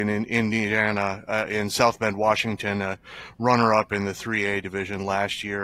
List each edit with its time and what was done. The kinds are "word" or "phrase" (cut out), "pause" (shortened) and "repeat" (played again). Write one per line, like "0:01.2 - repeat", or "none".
none